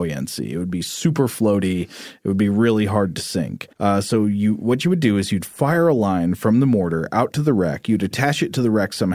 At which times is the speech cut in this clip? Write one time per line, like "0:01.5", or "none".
0:03.7